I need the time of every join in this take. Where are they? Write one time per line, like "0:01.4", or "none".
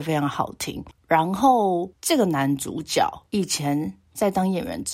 0:03.3